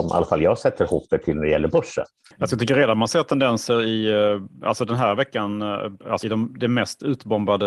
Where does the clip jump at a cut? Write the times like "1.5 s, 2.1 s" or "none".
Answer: 6.2 s